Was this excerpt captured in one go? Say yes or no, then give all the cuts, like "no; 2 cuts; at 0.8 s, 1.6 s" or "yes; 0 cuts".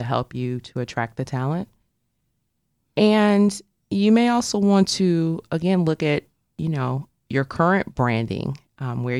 yes; 0 cuts